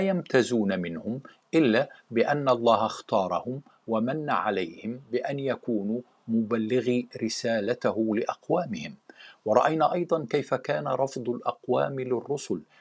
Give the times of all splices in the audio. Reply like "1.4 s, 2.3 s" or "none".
none